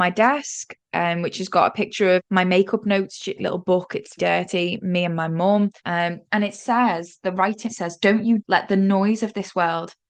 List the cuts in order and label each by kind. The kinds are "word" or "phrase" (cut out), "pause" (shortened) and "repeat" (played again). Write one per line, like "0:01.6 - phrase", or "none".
0:02.2 - word
0:03.4 - word
0:04.2 - word
0:05.8 - pause
0:07.6 - word
0:08.4 - word